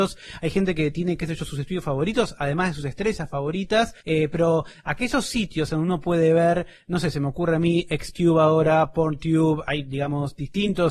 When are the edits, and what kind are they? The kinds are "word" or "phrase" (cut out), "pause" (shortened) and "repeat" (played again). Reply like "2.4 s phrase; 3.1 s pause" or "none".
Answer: 4.0 s pause

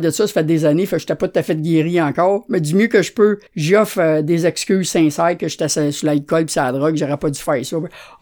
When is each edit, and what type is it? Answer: 3.5 s pause

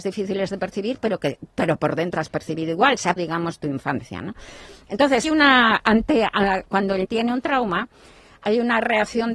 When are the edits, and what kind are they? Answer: 2.1 s word; 3.2 s word; 5.2 s word; 7.0 s word

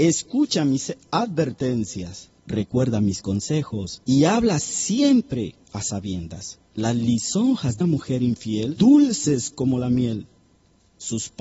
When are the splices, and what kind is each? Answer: 2.4 s pause; 4.0 s pause; 5.6 s pause; 6.7 s pause; 7.8 s word; 8.8 s word

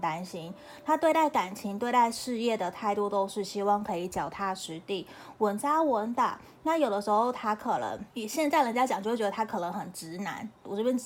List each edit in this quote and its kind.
8.1 s pause

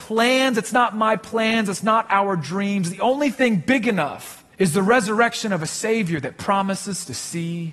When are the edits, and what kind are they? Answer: 4.5 s pause

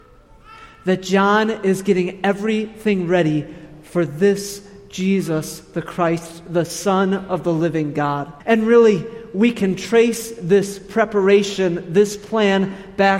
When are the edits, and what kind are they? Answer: 8.4 s pause

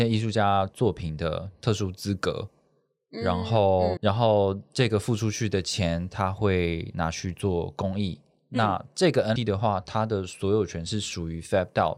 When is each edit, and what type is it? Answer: 4.0 s word; 9.4 s word

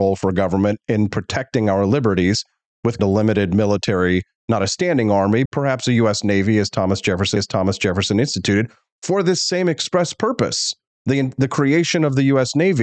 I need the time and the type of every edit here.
3.0 s phrase; 5.5 s word; 7.4 s repeat

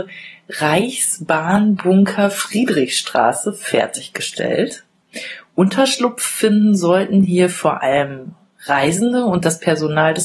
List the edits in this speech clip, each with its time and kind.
none

